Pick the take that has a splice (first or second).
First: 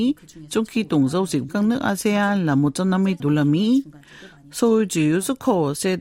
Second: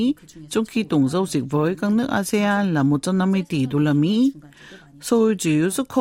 first